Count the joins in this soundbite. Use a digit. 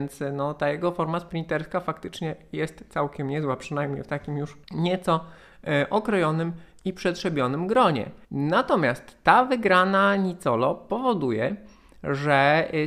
2